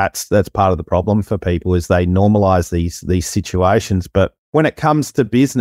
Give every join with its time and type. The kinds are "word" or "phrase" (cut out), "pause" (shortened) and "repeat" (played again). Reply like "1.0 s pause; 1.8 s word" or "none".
4.4 s pause